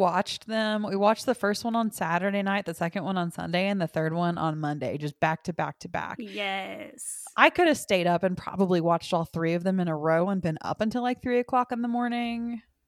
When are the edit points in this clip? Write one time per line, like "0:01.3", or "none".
none

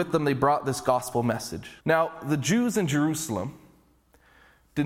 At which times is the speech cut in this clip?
0:01.8

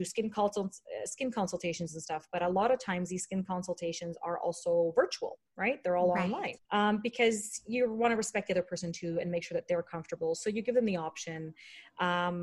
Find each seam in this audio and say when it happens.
0:05.5
0:06.6

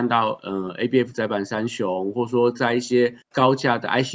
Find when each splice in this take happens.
0:03.2

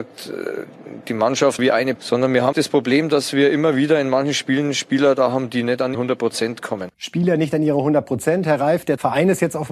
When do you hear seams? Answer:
0:01.6
0:02.0
0:02.5
0:05.9
0:06.9

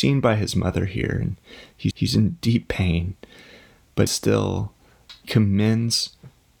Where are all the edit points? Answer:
0:01.9
0:04.1
0:05.2

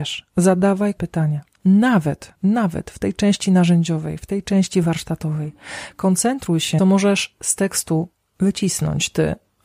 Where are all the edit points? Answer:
0:01.0
0:02.4
0:06.8

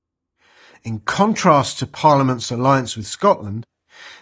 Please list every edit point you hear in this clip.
none

